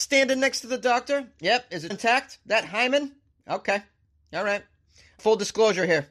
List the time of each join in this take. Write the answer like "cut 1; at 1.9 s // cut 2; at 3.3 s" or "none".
cut 1; at 1.9 s // cut 2; at 5.2 s